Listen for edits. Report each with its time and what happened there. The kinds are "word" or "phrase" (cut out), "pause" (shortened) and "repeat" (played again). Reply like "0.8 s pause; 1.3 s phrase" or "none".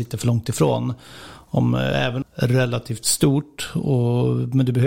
2.2 s phrase